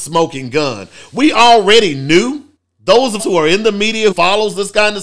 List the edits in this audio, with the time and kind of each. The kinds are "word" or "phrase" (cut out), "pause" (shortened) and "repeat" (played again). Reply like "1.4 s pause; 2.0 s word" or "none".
2.6 s pause; 3.2 s word; 4.1 s word